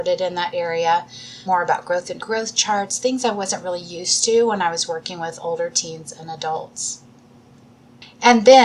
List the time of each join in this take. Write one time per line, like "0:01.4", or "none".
0:01.5
0:02.2